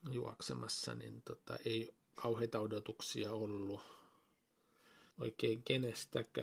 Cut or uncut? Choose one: cut